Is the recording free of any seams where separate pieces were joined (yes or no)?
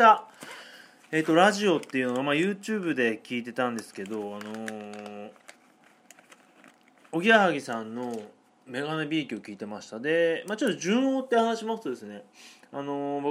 yes